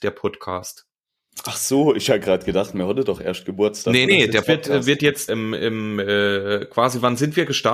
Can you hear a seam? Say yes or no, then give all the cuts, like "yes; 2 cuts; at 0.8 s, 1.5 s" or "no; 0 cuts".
yes; 3 cuts; at 4.1 s, 4.4 s, 5.3 s